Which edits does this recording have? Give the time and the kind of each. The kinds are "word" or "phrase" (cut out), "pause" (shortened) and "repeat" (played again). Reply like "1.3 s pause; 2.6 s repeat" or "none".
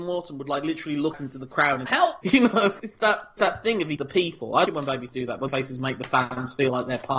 1.1 s word; 1.9 s word; 2.2 s word; 2.8 s word; 3.4 s word; 4.0 s word; 4.7 s word; 5.1 s word; 5.5 s word